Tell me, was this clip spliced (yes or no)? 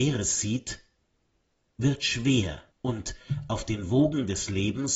yes